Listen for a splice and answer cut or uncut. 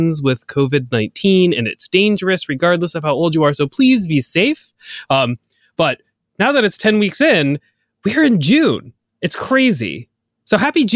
uncut